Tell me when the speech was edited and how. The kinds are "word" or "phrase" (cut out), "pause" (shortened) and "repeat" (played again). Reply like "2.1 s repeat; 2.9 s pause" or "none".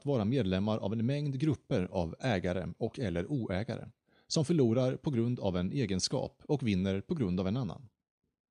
none